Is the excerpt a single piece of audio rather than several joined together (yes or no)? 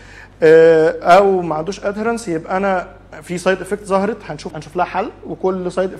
no